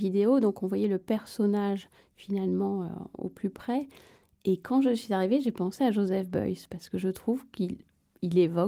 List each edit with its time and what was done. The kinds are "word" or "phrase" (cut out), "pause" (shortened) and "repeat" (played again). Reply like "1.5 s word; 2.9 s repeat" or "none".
none